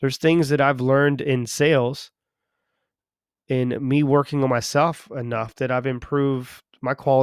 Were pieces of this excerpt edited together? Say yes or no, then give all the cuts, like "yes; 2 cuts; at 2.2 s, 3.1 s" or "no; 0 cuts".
no; 0 cuts